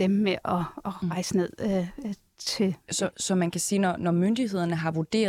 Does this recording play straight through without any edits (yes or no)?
yes